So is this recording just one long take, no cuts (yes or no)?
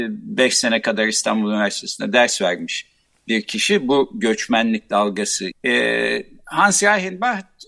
no